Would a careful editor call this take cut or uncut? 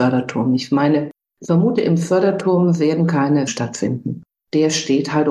cut